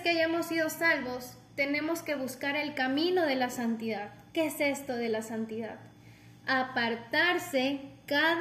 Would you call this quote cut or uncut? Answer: cut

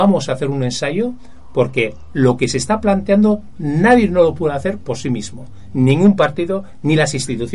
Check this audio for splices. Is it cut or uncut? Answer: uncut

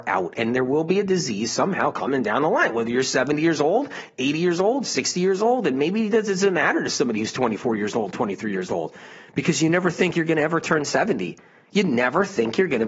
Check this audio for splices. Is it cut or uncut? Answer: uncut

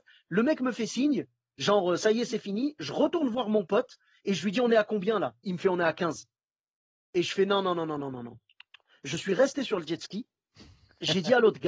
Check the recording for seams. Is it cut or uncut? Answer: uncut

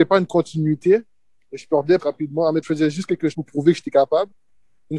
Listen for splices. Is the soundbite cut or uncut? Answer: cut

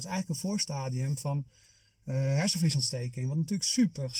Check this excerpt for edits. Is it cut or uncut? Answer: uncut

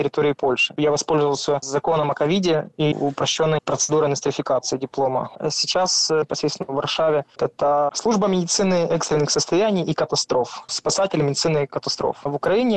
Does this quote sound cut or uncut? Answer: uncut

